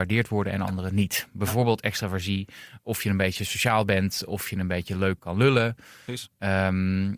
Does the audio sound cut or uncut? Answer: cut